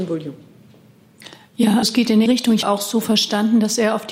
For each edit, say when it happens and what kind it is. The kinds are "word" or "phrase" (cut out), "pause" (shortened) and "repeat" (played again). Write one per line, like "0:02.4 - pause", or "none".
0:01.8 - word
0:02.3 - word
0:02.6 - phrase

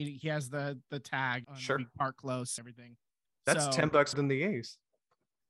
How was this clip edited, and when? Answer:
0:01.4 - word
0:02.6 - word
0:04.1 - word

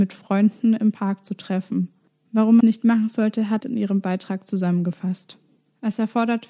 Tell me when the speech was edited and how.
0:02.6 - phrase
0:03.6 - phrase

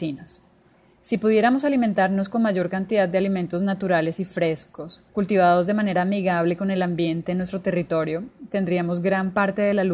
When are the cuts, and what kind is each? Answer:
0:05.1 - pause

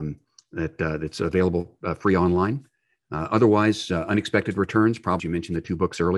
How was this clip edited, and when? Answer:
0:05.2 - word

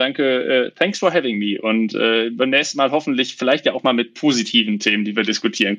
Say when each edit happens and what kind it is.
none

